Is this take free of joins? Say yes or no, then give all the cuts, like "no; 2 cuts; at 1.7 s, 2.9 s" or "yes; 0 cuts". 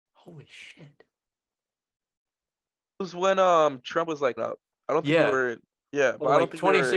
no; 2 cuts; at 3.0 s, 4.4 s